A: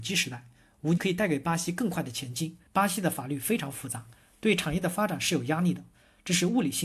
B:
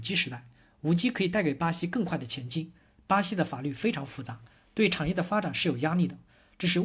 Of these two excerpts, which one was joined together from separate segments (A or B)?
A